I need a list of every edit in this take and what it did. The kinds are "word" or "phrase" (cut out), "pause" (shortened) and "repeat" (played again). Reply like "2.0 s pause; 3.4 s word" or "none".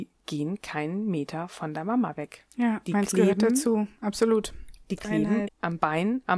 5.5 s word